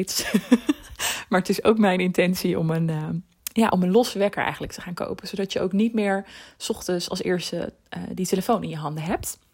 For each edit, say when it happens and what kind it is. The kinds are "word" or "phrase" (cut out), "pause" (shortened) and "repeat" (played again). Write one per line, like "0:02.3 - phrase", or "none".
none